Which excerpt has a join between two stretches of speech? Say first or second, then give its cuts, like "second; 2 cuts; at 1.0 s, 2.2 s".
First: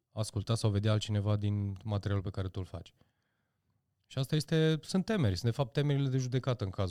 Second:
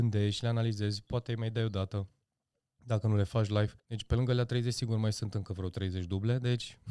second; 1 cut; at 3.8 s